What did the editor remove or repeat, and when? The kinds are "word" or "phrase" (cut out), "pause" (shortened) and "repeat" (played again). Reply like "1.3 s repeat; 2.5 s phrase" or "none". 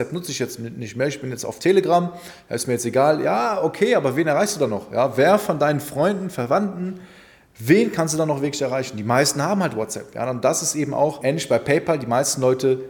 none